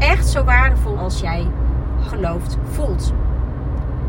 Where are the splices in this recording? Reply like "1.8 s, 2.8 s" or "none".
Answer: 0.9 s, 2.1 s